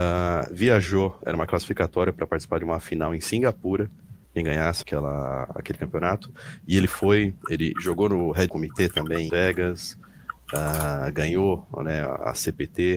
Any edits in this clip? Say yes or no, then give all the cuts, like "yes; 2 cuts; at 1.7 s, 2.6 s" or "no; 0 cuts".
yes; 4 cuts; at 4.2 s, 4.8 s, 8.5 s, 9.3 s